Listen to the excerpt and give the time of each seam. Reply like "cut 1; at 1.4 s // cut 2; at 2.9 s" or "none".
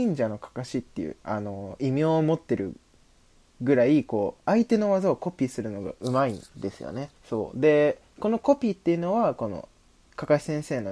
cut 1; at 1.2 s // cut 2; at 7.2 s